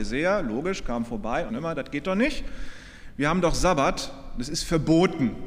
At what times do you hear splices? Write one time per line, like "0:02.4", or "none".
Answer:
0:01.5